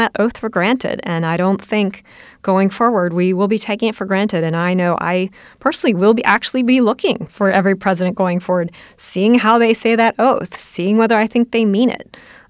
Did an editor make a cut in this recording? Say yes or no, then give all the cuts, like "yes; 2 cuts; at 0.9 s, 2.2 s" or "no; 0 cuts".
no; 0 cuts